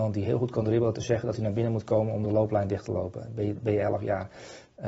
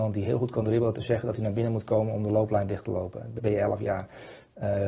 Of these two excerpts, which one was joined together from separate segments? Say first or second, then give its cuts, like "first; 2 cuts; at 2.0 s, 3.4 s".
second; 1 cut; at 3.4 s